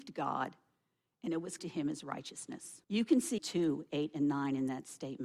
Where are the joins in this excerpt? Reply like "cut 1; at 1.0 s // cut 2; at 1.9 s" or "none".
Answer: cut 1; at 1.6 s // cut 2; at 2.8 s // cut 3; at 3.4 s